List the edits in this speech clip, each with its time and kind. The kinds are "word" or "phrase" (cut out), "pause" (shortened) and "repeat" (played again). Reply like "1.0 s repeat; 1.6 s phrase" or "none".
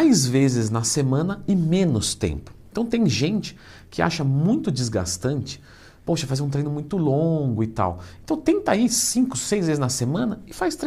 none